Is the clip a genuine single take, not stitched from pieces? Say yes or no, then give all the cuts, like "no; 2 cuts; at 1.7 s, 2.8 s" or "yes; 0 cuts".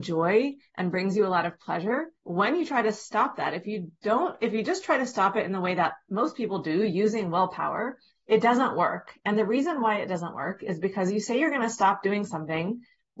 no; 2 cuts; at 2.2 s, 8.1 s